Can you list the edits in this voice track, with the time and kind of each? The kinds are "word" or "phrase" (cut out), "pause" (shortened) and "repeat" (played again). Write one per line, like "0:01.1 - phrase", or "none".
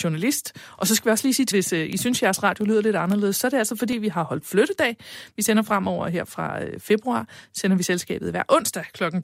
0:01.5 - word